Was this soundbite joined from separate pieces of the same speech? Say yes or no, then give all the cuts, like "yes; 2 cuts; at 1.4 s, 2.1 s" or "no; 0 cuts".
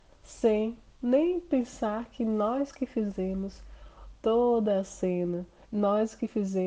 no; 0 cuts